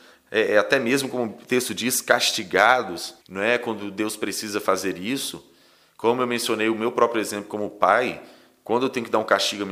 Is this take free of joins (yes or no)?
no